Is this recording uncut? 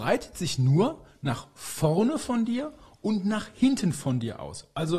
yes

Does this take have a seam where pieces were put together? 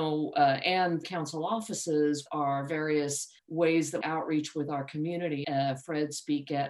yes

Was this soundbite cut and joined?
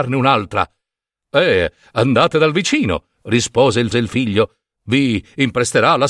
yes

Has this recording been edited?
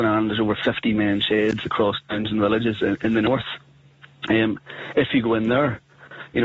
no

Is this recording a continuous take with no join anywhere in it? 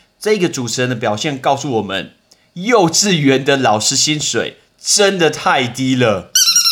yes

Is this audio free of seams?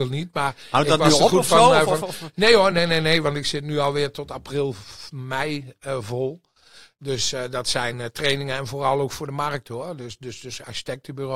yes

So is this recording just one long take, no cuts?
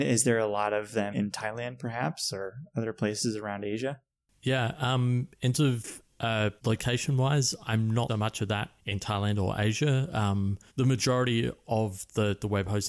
no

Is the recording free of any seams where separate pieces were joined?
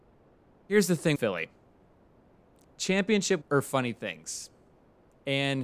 no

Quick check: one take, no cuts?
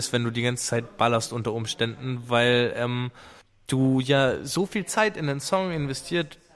no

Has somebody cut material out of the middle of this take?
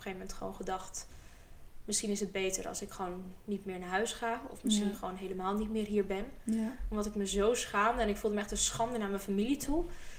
no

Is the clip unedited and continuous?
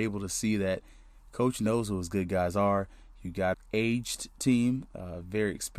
no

